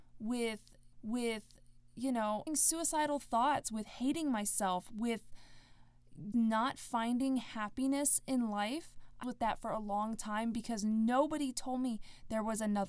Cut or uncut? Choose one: cut